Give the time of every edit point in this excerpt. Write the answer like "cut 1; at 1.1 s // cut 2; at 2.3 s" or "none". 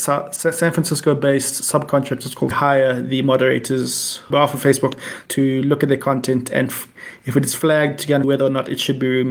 cut 1; at 2.5 s // cut 2; at 4.3 s // cut 3; at 5.3 s // cut 4; at 8.2 s